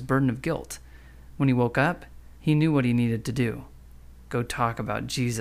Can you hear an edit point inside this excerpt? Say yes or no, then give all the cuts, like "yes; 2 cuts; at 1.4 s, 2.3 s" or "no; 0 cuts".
yes; 1 cut; at 2.4 s